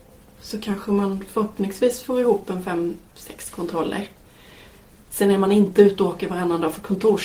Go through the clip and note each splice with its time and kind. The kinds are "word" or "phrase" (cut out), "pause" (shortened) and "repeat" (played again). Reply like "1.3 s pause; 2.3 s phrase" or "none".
none